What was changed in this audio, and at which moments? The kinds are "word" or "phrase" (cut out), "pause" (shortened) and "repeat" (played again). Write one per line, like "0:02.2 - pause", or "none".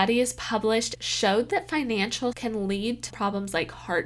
0:01.0 - word
0:02.3 - word
0:03.1 - word

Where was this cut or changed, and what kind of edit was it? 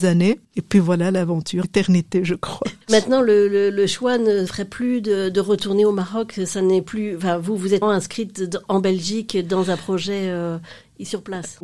0:01.6 - phrase
0:02.8 - pause
0:04.5 - word
0:07.8 - word

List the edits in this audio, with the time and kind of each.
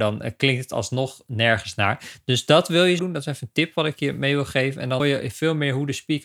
0:03.0 - word
0:05.0 - word

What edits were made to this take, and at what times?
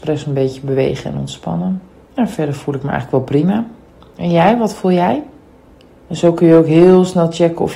none

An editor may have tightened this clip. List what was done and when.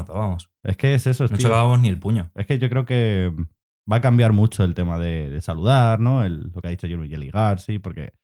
none

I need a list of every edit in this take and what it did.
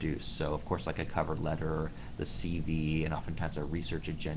none

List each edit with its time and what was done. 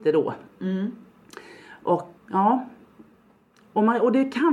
0:02.2 - word

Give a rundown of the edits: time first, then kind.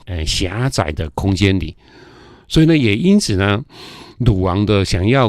none

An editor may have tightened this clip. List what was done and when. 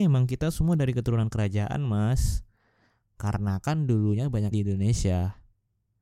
0:04.5 - word

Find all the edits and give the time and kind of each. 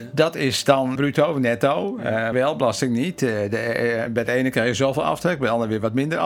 0:01.0 - phrase
0:02.3 - word
0:04.1 - word

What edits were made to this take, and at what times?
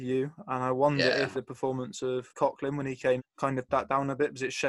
0:01.3 - word
0:02.3 - word
0:03.2 - word
0:03.7 - word

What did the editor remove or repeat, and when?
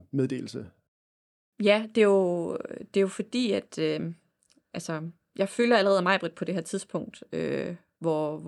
none

